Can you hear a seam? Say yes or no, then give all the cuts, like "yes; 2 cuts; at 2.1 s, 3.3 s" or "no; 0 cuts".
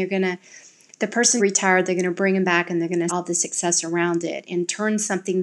yes; 2 cuts; at 1.4 s, 3.1 s